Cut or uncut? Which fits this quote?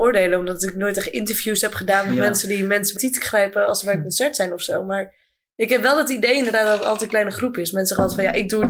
cut